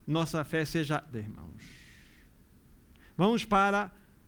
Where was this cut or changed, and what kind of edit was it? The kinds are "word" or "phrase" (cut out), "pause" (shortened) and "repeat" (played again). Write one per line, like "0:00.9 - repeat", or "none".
0:01.1 - word

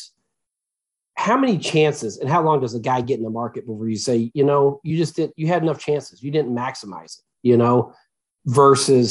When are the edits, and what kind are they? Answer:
none

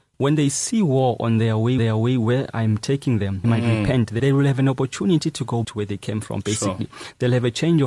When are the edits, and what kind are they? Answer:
0:01.8 - repeat
0:03.4 - word
0:04.2 - word
0:05.6 - word

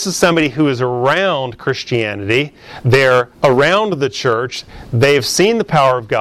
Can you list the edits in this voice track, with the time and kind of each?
0:03.3 - pause

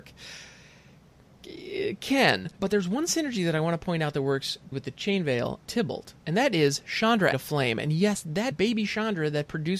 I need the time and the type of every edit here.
0:02.6 - pause
0:04.7 - word
0:05.6 - word
0:06.2 - pause
0:07.3 - word
0:08.5 - phrase

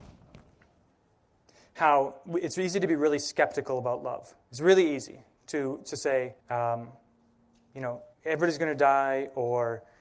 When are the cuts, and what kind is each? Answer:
0:06.4 - pause
0:08.1 - pause

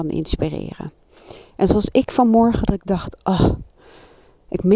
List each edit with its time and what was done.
none

